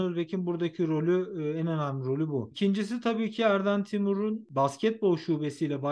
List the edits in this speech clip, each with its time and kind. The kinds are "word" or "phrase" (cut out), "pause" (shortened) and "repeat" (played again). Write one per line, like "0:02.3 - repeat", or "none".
none